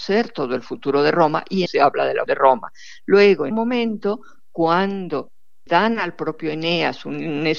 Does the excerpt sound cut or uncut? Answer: cut